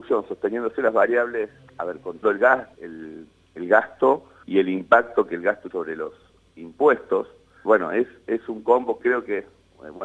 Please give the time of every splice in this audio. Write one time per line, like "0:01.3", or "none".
0:01.7
0:02.2
0:02.7
0:04.4
0:05.7
0:07.7